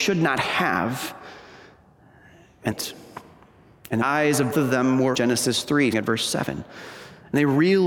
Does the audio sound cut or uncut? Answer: cut